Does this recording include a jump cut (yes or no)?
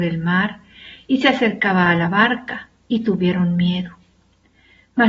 no